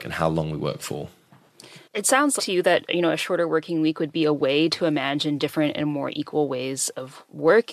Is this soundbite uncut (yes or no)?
no